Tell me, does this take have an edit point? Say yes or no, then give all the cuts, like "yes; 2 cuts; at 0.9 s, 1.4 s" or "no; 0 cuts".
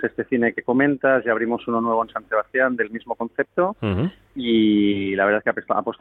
no; 0 cuts